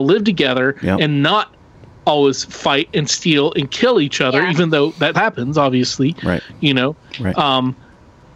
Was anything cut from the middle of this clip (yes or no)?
yes